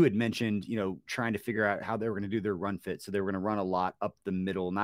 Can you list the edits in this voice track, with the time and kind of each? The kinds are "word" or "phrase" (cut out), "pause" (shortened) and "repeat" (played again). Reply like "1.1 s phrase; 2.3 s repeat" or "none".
none